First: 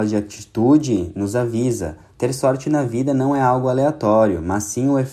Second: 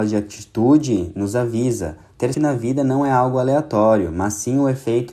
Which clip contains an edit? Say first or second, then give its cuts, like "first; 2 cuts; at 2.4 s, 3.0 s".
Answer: second; 1 cut; at 2.3 s